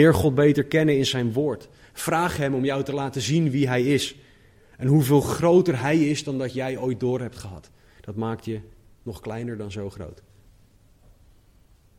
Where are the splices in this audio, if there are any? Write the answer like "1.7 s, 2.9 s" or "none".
none